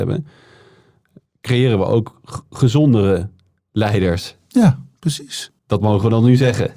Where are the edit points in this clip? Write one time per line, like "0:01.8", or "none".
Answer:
0:05.6